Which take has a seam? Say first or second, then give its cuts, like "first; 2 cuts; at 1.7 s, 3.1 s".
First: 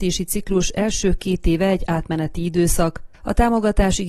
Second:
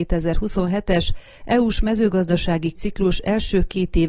second; 1 cut; at 2.8 s